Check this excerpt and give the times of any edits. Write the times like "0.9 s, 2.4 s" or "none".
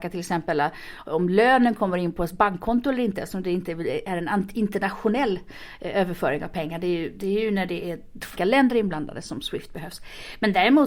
8.4 s